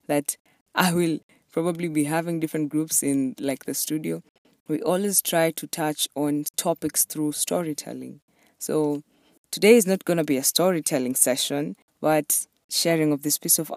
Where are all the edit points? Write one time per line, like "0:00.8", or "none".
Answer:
none